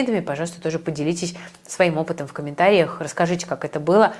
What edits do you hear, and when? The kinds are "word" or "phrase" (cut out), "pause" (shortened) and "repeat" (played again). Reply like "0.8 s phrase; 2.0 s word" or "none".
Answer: none